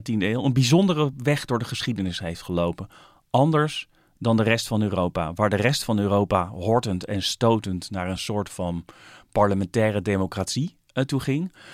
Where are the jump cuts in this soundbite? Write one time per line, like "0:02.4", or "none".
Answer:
none

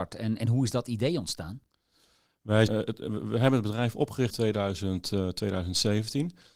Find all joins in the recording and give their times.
0:02.7
0:04.3

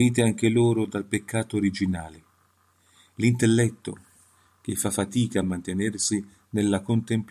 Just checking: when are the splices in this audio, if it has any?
none

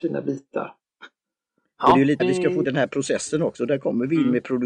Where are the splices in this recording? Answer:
0:02.2
0:02.6

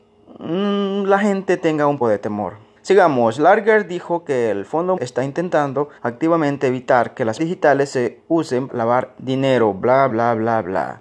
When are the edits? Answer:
0:02.0
0:02.8
0:05.0
0:06.0
0:07.4
0:08.7
0:10.1

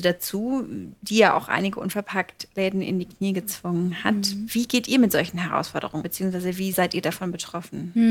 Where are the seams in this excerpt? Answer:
0:06.0
0:06.7

